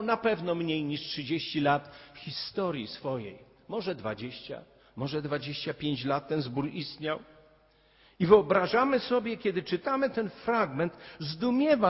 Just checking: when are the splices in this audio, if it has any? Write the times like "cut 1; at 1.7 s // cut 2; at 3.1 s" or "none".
none